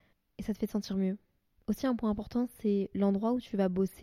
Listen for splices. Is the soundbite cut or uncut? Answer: uncut